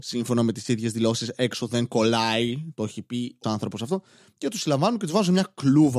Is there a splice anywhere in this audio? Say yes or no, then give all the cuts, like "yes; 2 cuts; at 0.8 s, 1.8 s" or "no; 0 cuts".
yes; 1 cut; at 3.4 s